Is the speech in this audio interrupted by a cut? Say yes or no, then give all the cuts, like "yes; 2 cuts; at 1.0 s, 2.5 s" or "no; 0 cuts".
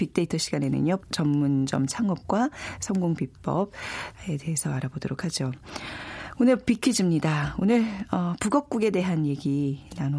yes; 1 cut; at 1.0 s